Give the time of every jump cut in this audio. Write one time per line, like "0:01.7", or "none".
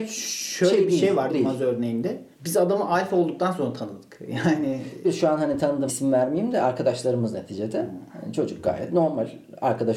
0:01.3
0:02.3
0:05.0
0:05.9